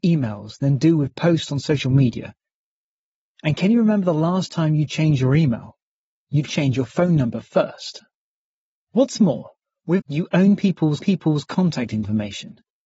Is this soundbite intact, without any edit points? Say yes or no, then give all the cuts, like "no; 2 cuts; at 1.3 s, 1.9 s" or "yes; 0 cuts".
no; 3 cuts; at 6.5 s, 10.0 s, 11.0 s